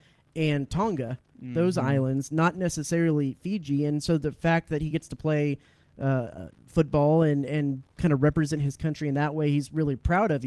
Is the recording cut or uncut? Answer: uncut